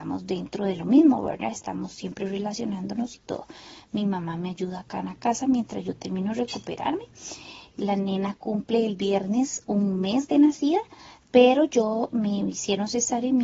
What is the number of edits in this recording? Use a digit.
0